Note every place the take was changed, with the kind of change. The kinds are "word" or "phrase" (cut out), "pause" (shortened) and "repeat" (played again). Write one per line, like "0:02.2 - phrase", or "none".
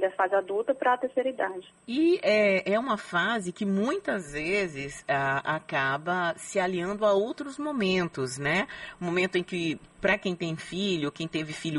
none